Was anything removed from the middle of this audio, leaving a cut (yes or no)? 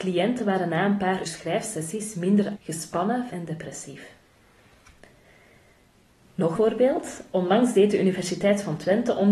yes